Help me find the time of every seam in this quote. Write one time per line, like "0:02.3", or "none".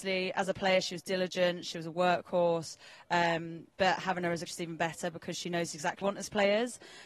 0:04.5
0:06.0